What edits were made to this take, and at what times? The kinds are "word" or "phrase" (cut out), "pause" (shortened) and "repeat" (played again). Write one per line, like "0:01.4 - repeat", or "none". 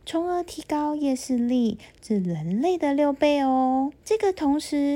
0:04.0 - pause